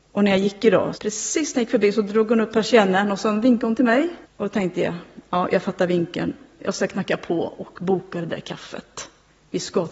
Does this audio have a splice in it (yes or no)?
yes